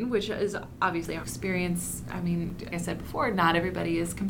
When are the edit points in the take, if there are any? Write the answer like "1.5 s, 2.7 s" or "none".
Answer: 1.2 s, 2.7 s